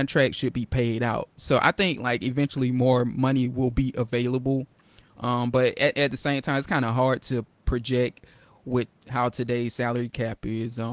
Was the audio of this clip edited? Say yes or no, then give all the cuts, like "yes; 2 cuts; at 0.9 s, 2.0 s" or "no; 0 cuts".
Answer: no; 0 cuts